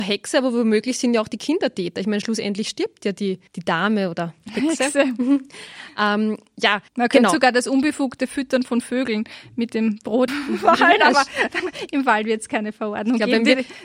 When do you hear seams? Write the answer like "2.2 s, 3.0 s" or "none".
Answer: 3.5 s, 6.9 s, 10.3 s